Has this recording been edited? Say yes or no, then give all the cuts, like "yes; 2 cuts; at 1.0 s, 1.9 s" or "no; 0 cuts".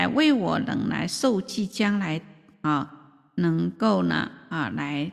no; 0 cuts